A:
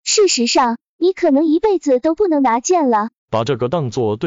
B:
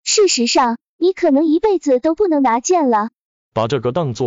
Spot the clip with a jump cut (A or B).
A